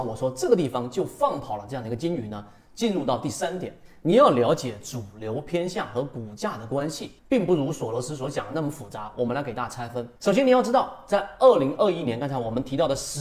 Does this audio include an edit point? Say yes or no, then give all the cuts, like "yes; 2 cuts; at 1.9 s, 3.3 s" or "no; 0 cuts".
yes; 2 cuts; at 7.2 s, 10.2 s